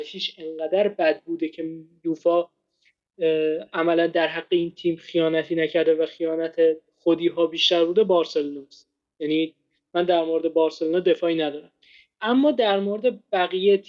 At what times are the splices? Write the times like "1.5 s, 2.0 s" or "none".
none